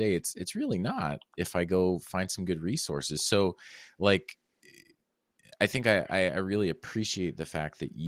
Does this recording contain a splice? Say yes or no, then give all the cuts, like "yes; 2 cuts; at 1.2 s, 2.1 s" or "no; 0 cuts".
no; 0 cuts